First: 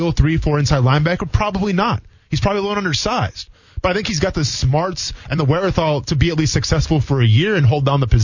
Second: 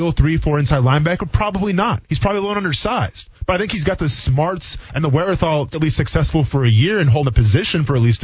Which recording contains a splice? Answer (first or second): second